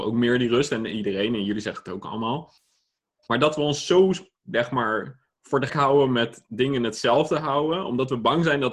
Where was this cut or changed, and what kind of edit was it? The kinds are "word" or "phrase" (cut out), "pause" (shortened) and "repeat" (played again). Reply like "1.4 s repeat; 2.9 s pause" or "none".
5.7 s word

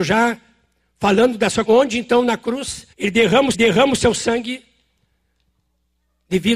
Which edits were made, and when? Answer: 1.7 s word; 2.9 s pause; 3.5 s repeat

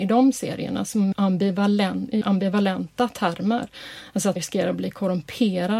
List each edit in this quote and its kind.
1.1 s word; 2.2 s word; 4.4 s word

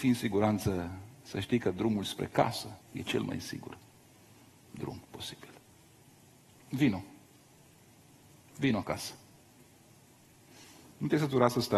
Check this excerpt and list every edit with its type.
2.8 s pause; 5.0 s pause

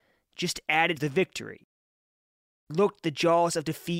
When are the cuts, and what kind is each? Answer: 1.0 s phrase; 2.7 s word

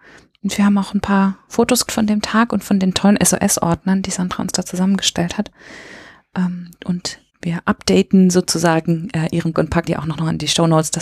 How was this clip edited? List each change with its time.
1.9 s word; 7.3 s pause; 9.5 s word; 9.9 s word

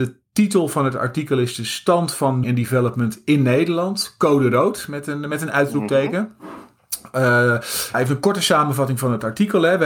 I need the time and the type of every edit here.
2.4 s word; 7.9 s word

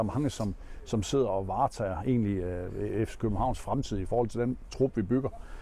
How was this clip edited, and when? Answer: none

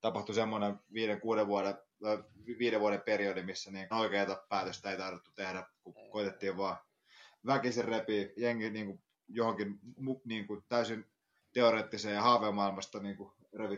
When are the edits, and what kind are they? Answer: 3.9 s phrase; 8.4 s word; 10.0 s word

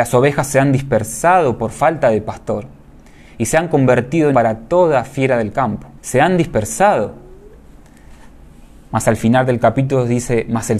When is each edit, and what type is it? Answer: 4.3 s word; 6.0 s pause

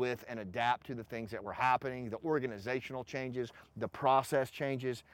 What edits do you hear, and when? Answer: none

